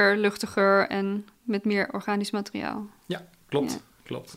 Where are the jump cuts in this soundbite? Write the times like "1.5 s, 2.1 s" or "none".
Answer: none